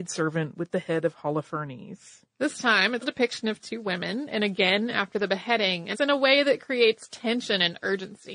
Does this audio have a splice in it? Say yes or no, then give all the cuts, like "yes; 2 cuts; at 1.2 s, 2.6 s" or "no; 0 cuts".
yes; 3 cuts; at 2.3 s, 3.0 s, 5.9 s